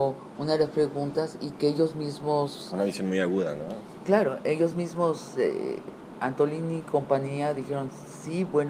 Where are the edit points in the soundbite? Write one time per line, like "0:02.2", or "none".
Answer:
none